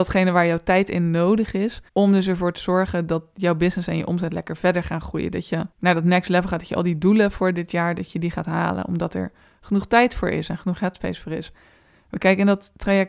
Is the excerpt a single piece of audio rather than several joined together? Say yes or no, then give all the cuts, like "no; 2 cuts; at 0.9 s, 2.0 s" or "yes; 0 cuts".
no; 2 cuts; at 1.9 s, 5.7 s